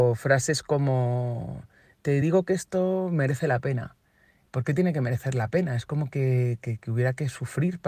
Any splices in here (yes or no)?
no